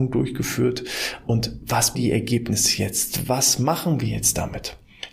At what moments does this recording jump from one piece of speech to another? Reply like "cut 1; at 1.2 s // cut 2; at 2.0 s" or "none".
cut 1; at 1.9 s